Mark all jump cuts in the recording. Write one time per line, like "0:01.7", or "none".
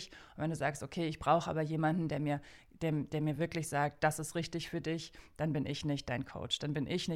none